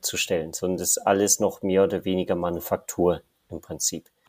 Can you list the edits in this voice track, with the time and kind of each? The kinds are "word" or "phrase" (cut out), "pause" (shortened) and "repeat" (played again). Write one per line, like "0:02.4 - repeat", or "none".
none